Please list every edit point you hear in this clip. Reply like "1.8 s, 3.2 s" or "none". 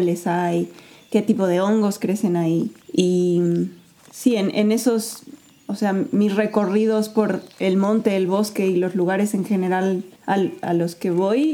2.8 s, 7.5 s, 10.2 s